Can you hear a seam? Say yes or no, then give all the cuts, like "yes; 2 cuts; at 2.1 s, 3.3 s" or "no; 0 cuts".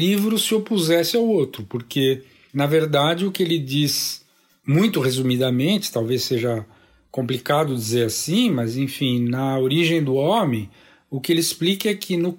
no; 0 cuts